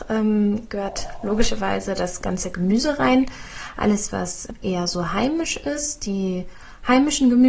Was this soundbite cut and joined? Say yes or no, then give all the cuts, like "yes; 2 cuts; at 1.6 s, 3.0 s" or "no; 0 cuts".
no; 0 cuts